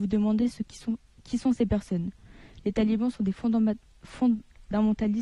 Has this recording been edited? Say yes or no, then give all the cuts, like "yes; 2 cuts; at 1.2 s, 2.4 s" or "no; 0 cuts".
no; 0 cuts